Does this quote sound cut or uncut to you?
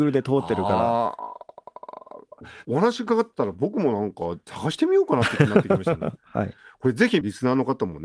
uncut